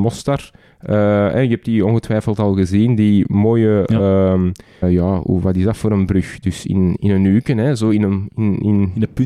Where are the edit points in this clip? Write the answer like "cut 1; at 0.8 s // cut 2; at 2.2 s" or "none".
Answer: cut 1; at 4.8 s // cut 2; at 7.0 s